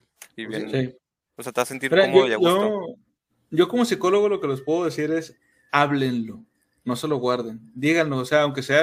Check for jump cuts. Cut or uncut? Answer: uncut